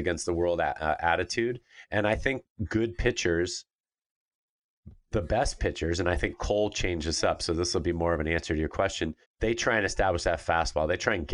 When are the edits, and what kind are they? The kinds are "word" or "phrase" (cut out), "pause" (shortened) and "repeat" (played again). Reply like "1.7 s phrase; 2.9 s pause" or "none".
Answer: 9.2 s pause